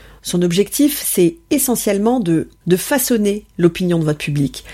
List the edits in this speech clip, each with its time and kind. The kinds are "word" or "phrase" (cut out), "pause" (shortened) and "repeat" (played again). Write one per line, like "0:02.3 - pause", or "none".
0:02.6 - word